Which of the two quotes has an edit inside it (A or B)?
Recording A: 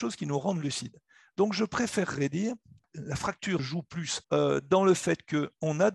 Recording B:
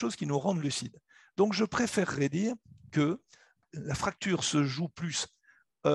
A